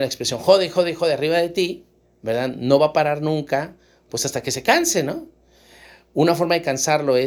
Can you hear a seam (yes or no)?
no